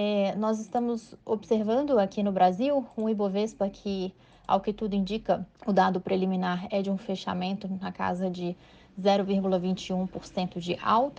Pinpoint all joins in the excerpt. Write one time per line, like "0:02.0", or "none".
0:05.5